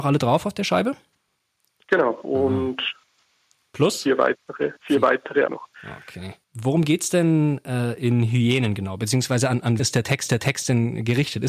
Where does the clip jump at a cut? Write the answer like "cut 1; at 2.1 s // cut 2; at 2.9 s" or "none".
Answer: cut 1; at 2.2 s // cut 2; at 4.8 s // cut 3; at 5.5 s // cut 4; at 6.4 s // cut 5; at 9.8 s // cut 6; at 10.3 s